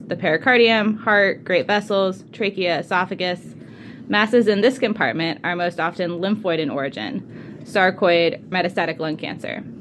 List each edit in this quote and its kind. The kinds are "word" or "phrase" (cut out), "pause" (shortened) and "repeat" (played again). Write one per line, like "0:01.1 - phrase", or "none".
0:07.6 - word
0:08.5 - word